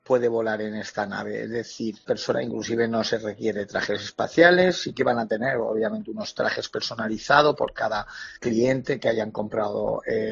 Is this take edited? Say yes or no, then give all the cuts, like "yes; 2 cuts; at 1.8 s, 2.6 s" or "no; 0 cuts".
no; 0 cuts